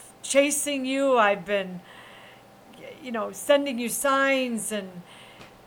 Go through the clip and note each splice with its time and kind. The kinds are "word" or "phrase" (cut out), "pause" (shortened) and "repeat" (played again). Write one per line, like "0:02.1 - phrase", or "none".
none